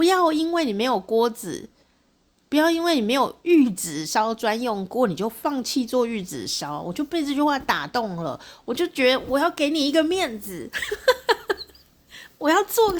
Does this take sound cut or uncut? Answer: uncut